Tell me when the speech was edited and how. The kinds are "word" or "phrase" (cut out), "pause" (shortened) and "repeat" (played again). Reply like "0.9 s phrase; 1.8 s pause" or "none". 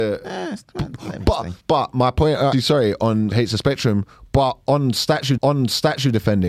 1.6 s pause; 2.5 s word; 3.3 s word; 5.4 s repeat